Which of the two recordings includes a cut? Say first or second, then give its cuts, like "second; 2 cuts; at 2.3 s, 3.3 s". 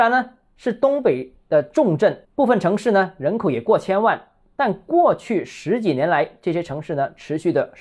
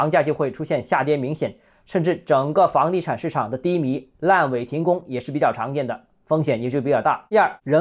first; 1 cut; at 2.2 s